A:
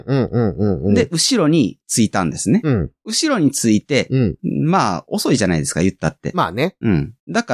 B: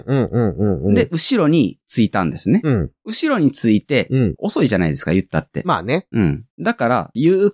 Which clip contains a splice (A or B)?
B